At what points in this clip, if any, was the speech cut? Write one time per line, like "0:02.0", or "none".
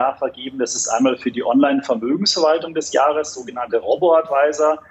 none